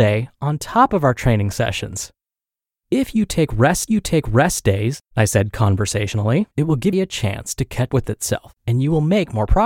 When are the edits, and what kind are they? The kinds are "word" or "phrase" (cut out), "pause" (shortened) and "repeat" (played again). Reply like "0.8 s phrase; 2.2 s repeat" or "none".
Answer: 3.9 s repeat; 6.5 s pause; 6.9 s phrase; 7.9 s word; 8.6 s pause